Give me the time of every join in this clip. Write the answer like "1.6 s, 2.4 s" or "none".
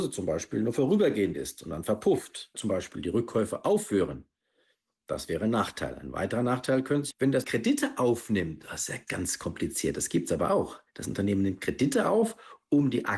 2.5 s, 7.1 s, 7.4 s, 9.1 s